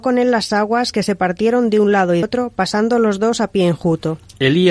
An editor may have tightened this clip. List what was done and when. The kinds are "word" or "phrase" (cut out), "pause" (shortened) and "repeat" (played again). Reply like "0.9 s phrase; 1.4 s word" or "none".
2.2 s word

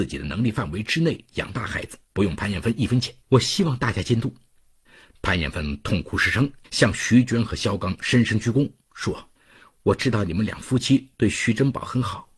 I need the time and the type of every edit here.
2.1 s pause; 3.2 s pause; 4.8 s pause; 6.6 s pause; 9.3 s pause

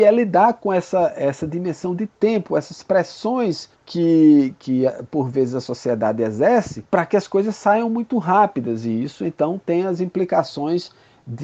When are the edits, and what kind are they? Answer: 3.7 s pause; 6.9 s pause

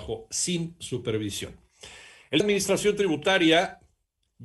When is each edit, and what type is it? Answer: 2.4 s phrase

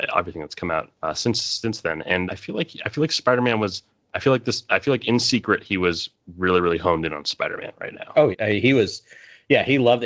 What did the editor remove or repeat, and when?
0.9 s pause; 2.3 s word; 3.9 s pause; 8.3 s word

